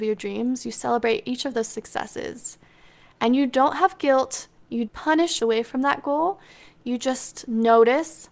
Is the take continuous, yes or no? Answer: no